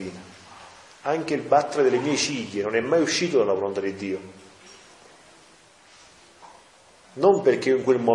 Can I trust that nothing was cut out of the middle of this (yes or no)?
yes